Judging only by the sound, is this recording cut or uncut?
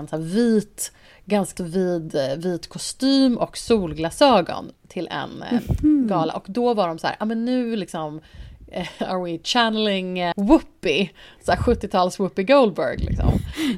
cut